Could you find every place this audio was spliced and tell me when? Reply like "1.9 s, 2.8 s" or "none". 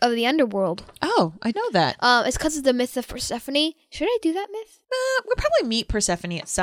1.5 s, 4.8 s